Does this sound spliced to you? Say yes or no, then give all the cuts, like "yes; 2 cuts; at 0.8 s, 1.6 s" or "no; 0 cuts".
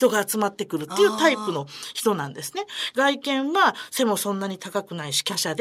no; 0 cuts